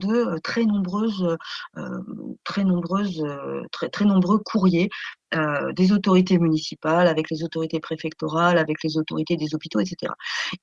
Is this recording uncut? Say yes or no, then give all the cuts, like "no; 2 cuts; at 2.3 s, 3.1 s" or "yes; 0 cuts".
yes; 0 cuts